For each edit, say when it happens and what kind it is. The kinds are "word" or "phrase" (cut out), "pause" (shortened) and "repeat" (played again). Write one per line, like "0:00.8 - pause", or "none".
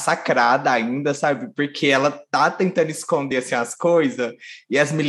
none